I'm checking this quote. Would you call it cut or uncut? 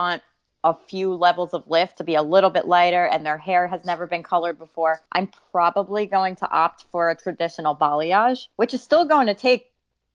cut